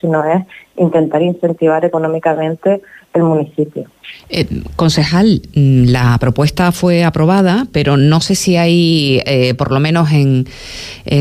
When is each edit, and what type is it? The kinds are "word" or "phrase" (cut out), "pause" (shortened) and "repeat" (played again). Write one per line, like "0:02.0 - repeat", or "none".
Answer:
none

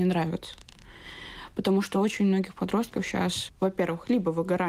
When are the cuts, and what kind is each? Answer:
none

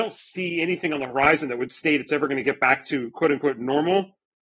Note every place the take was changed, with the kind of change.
none

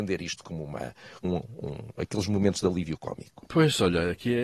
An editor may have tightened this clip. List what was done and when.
0:01.2 - word

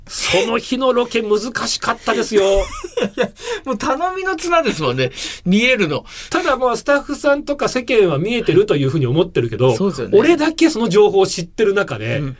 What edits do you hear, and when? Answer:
none

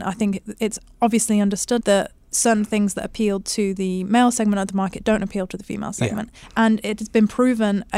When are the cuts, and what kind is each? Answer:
0:01.8 - word
0:06.4 - pause

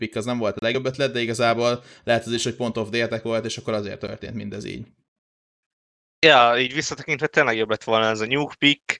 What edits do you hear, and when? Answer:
none

